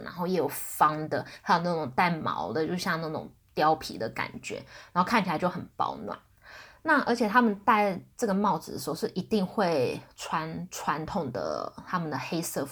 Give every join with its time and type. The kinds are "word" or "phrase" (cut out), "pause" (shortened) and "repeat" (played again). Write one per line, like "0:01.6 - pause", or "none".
none